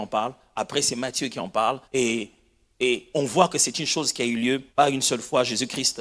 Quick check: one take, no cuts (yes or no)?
no